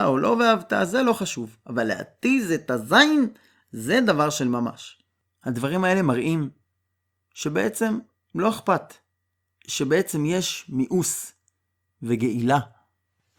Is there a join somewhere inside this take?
no; 0 cuts

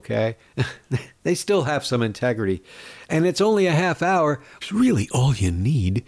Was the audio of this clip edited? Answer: yes; 1 cut; at 4.6 s

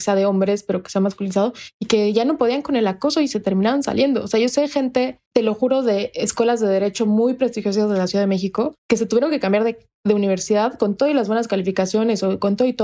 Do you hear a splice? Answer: yes; 2 cuts; at 5.3 s, 8.8 s

